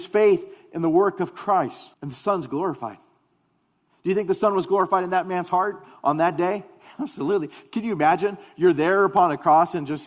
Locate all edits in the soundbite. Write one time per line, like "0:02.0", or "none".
0:01.9